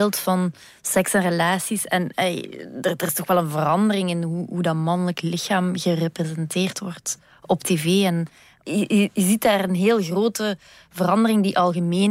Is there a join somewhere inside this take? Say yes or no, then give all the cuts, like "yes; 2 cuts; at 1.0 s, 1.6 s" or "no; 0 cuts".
no; 0 cuts